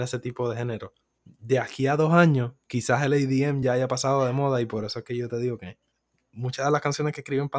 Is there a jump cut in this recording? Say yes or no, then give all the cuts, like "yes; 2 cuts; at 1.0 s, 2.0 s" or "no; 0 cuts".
no; 0 cuts